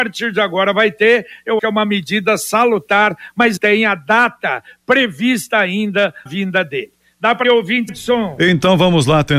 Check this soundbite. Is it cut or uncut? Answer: cut